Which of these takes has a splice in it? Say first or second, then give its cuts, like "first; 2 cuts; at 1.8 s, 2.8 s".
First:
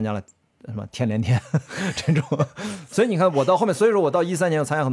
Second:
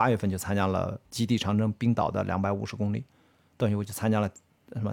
second; 1 cut; at 1.0 s